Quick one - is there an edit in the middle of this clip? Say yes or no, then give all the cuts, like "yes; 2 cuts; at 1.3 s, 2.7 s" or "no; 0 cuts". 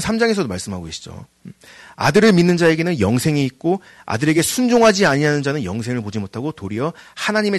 no; 0 cuts